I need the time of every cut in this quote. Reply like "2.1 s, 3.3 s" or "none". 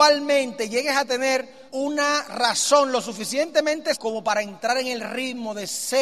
1.7 s, 3.9 s